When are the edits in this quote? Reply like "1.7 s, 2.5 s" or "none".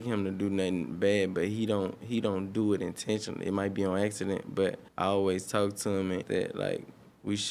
4.9 s, 6.2 s